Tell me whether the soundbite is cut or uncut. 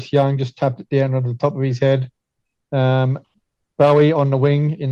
uncut